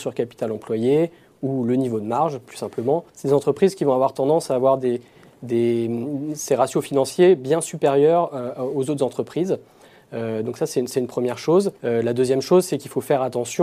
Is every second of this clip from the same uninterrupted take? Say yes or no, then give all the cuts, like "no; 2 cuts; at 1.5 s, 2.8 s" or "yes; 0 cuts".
no; 2 cuts; at 3.1 s, 11.8 s